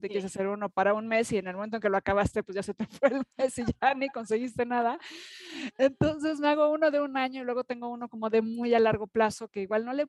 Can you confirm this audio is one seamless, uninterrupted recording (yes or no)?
yes